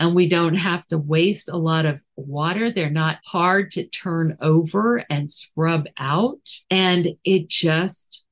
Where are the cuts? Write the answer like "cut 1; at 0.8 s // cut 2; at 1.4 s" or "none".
cut 1; at 3.2 s // cut 2; at 6.6 s